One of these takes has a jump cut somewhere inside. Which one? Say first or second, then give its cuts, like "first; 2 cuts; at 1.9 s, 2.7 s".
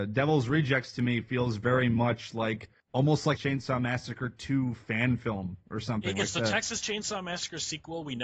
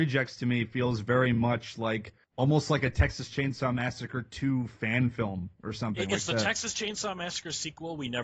first; 1 cut; at 3.4 s